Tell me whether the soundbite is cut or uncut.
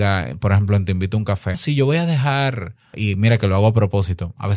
cut